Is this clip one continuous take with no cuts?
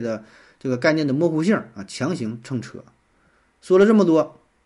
yes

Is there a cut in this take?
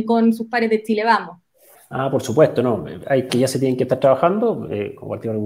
yes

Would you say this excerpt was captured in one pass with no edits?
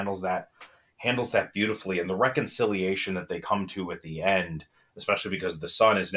yes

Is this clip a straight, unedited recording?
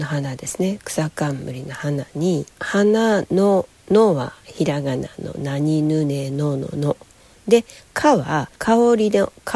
no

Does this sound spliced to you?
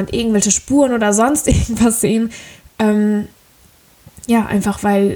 no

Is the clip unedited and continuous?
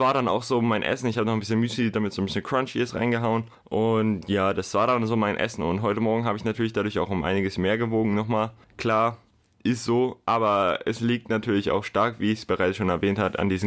yes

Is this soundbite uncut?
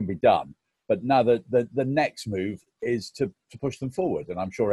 yes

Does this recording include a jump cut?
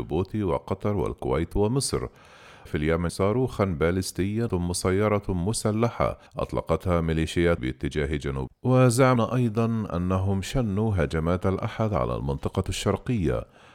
yes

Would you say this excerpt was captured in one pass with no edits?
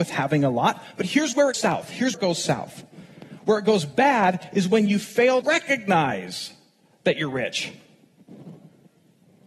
no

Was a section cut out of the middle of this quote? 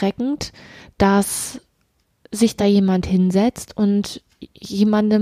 no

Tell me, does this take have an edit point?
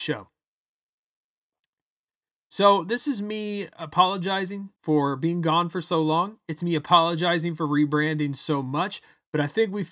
yes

